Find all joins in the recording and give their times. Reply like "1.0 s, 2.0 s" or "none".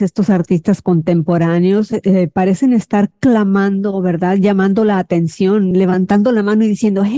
none